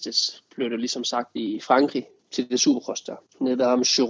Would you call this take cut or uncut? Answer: cut